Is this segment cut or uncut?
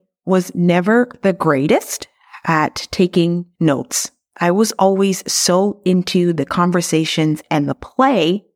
uncut